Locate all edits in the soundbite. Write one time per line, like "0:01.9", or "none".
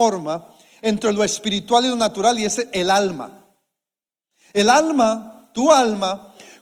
none